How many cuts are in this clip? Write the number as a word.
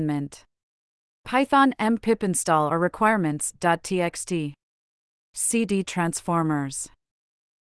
zero